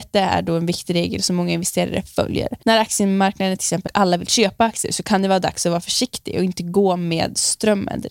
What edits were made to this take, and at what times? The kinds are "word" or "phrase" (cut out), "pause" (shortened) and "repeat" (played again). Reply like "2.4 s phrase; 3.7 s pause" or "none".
2.6 s pause; 3.9 s phrase

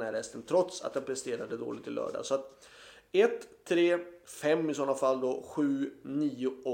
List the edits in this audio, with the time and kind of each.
none

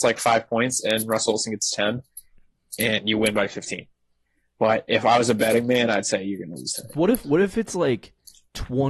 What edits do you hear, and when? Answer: none

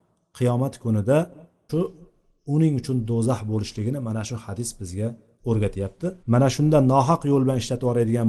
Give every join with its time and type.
1.7 s word; 6.2 s pause

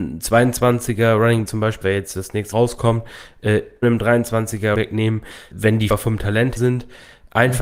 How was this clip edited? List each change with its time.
1.5 s word; 1.8 s word; 2.5 s word; 3.8 s word; 4.7 s word; 5.5 s word; 5.9 s word; 6.6 s word

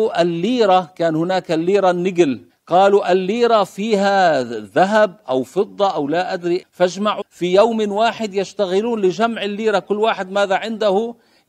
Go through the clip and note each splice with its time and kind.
2.5 s pause; 6.6 s word; 7.2 s phrase

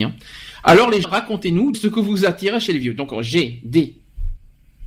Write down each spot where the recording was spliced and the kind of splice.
1.0 s word; 1.7 s word

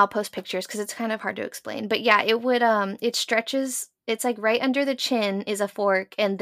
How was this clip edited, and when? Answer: none

